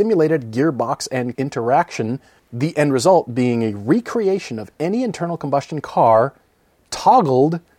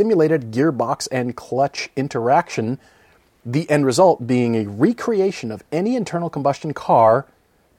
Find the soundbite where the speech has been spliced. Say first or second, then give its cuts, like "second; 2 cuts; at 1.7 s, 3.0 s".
first; 2 cuts; at 1.3 s, 2.4 s